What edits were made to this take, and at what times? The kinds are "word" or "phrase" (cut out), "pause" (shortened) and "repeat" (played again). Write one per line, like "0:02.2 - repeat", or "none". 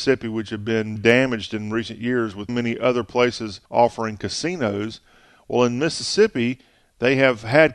0:01.0 - word
0:02.5 - word
0:03.7 - pause